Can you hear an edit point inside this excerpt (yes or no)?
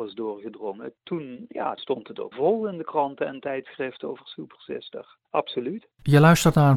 yes